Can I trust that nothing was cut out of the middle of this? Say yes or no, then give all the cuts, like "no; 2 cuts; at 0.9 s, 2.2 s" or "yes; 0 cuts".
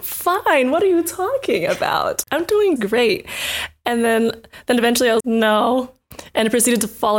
no; 3 cuts; at 2.2 s, 2.8 s, 5.2 s